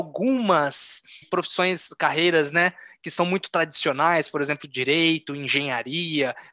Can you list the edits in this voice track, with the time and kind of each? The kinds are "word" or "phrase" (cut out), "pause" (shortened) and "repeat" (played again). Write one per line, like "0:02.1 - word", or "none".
0:01.2 - phrase